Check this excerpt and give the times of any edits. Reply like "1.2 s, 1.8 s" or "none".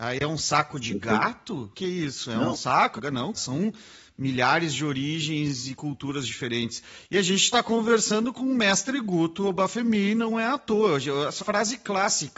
1.7 s, 3.0 s, 3.4 s, 11.4 s